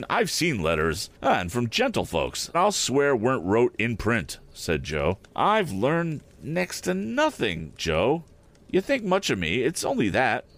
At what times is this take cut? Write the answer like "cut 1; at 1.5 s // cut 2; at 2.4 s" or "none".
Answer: cut 1; at 1.2 s // cut 2; at 2.5 s // cut 3; at 5.3 s